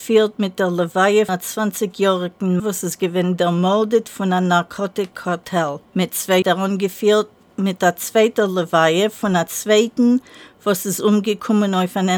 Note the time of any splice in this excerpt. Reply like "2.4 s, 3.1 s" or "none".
1.3 s, 2.6 s, 5.8 s, 6.4 s

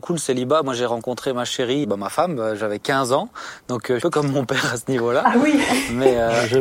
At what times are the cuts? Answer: 1.8 s, 4.0 s

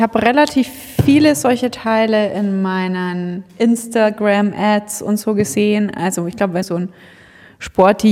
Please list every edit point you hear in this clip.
6.6 s

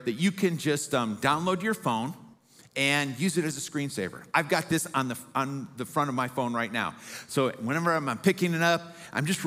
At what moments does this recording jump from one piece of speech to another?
none

